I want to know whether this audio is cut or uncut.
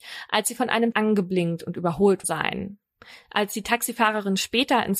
cut